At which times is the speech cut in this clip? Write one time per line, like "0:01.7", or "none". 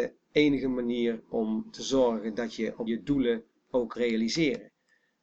0:02.9
0:03.9